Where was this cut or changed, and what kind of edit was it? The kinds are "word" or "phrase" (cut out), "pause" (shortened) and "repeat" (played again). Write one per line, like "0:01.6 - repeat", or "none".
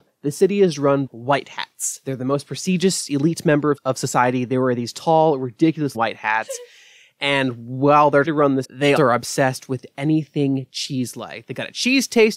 0:01.1 - word
0:03.8 - word
0:05.9 - word
0:08.2 - word
0:08.6 - word
0:09.0 - word